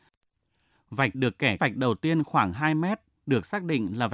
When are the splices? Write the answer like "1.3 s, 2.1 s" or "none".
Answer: 1.1 s, 1.6 s